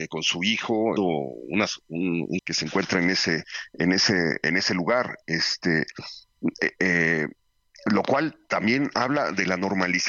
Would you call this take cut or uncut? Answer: cut